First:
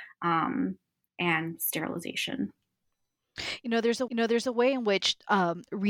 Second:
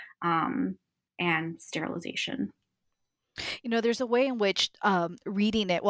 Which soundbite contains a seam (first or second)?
first